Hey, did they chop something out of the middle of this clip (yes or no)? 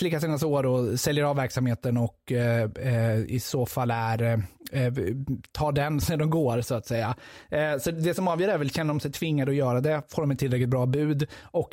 yes